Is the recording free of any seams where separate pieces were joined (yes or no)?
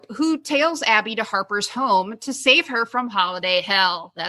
yes